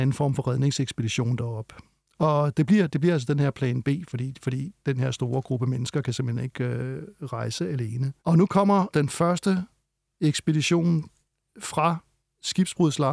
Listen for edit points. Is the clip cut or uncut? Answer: cut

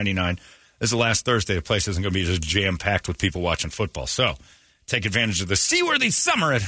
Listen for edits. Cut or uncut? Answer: uncut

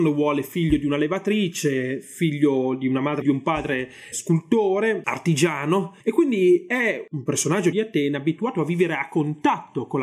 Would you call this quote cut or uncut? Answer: cut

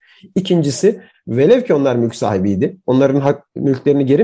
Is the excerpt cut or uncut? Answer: uncut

